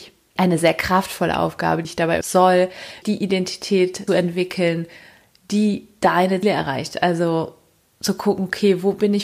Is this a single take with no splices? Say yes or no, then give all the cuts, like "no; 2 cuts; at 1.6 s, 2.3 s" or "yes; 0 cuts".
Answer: no; 5 cuts; at 1.8 s, 2.2 s, 3.0 s, 4.1 s, 6.4 s